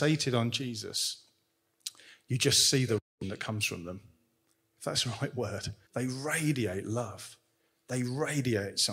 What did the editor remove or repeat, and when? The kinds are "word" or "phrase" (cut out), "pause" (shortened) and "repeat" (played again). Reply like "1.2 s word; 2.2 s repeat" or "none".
3.1 s pause; 5.8 s pause